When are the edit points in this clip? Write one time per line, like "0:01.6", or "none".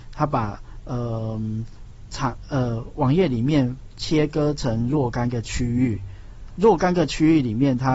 0:06.5